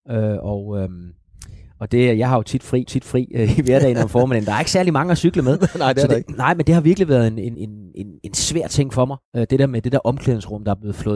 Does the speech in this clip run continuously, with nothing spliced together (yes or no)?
no